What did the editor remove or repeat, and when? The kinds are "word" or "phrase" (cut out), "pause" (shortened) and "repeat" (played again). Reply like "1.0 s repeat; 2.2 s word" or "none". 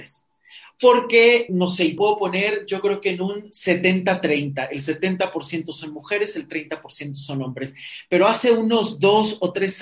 1.5 s word; 2.0 s word

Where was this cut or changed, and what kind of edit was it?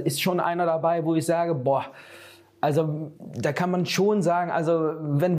3.2 s pause

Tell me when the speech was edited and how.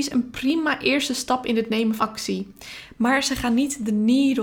2.0 s word

